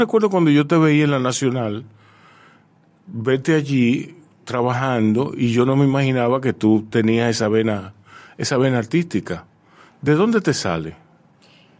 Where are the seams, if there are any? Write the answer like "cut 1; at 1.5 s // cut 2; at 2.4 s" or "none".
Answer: none